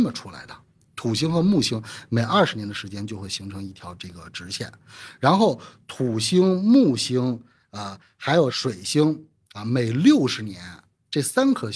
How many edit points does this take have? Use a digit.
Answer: 0